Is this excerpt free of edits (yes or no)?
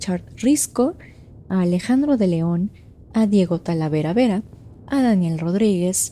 yes